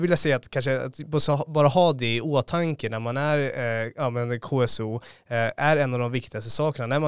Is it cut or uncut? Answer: cut